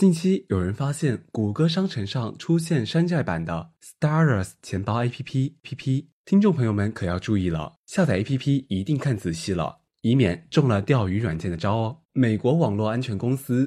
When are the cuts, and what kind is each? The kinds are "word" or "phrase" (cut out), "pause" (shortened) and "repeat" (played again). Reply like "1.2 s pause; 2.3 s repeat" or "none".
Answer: 5.6 s repeat; 12.0 s pause